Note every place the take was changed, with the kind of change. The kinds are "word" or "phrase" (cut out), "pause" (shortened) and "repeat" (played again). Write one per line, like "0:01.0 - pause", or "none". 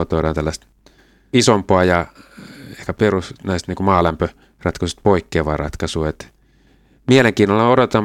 none